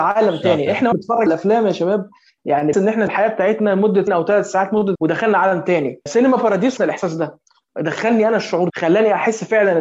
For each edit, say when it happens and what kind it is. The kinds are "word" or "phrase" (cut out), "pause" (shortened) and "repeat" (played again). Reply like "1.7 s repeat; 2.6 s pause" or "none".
0.9 s word; 1.3 s word; 2.7 s word; 3.1 s word; 4.1 s word; 5.0 s word; 6.1 s word; 6.8 s word; 8.7 s word